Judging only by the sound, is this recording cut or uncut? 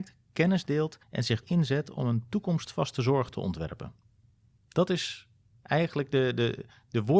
cut